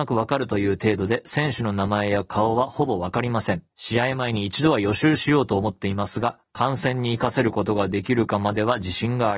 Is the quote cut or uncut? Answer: cut